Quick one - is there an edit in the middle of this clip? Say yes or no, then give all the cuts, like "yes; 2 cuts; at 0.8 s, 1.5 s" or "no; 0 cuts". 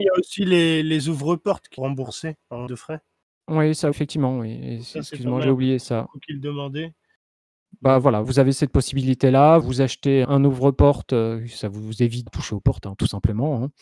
yes; 8 cuts; at 1.8 s, 2.7 s, 3.9 s, 5.4 s, 8.2 s, 9.6 s, 10.2 s, 12.3 s